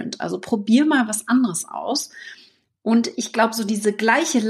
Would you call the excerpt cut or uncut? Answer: uncut